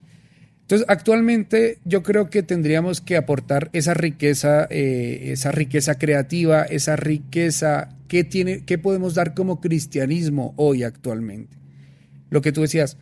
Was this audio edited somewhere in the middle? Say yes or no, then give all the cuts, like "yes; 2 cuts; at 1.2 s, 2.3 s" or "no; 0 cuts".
no; 0 cuts